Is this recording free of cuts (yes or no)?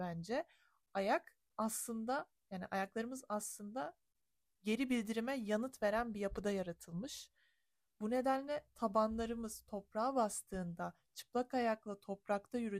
yes